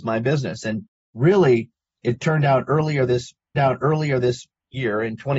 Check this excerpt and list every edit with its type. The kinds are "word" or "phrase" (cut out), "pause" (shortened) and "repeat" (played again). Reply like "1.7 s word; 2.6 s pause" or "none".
3.5 s repeat